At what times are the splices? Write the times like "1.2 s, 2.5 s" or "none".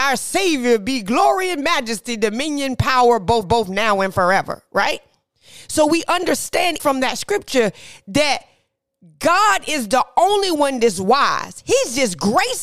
3.4 s, 6.8 s